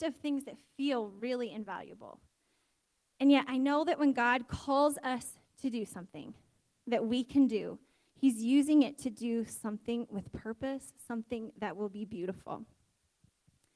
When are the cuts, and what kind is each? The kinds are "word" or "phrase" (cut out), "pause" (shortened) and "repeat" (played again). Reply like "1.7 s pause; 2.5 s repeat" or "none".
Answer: none